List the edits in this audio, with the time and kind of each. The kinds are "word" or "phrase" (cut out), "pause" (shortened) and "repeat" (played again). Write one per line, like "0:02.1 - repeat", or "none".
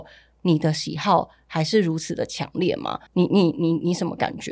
0:03.1 - pause